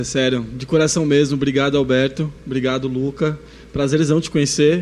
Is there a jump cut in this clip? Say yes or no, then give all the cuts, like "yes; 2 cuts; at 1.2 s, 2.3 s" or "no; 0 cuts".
no; 0 cuts